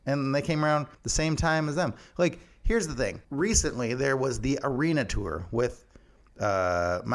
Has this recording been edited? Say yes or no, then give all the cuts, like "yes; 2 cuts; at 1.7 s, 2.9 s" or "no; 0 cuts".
yes; 2 cuts; at 0.9 s, 3.2 s